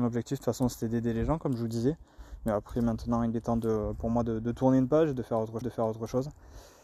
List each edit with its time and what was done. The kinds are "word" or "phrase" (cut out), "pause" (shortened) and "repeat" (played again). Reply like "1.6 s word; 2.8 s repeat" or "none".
5.6 s repeat